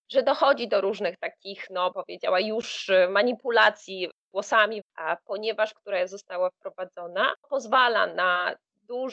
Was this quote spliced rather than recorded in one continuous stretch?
yes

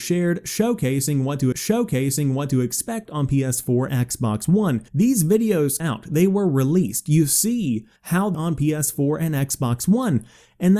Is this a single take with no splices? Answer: no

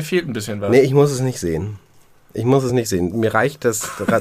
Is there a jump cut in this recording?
no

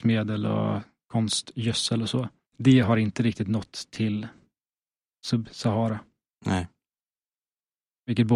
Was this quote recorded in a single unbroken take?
no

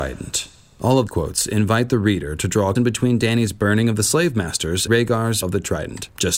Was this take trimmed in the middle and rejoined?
yes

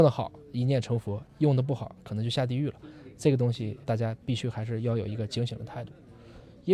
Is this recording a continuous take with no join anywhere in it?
no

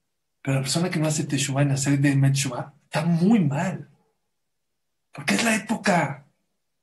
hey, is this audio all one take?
yes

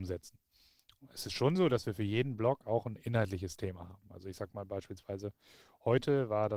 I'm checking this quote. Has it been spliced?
no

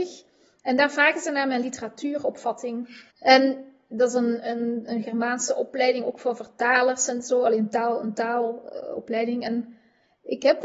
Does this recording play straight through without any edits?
no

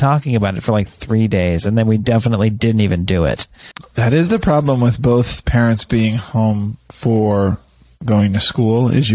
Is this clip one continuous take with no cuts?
yes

